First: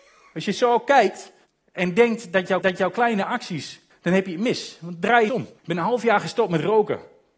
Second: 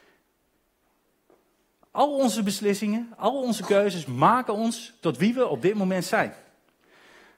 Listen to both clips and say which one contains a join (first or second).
first